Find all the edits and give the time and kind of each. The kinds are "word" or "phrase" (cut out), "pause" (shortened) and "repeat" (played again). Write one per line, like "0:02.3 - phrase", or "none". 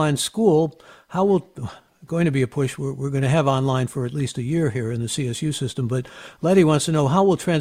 none